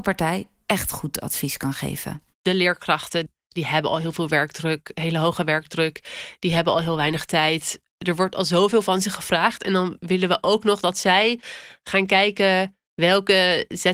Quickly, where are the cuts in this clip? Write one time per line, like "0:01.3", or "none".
0:02.3
0:07.9